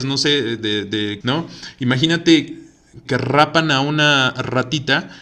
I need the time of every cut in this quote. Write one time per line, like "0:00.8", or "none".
0:01.2
0:03.1